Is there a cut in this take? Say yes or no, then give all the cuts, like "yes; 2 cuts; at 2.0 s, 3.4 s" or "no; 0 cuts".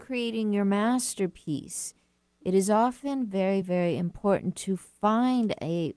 no; 0 cuts